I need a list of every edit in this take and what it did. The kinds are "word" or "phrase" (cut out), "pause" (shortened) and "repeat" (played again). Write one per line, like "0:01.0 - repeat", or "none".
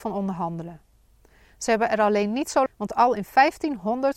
0:02.7 - phrase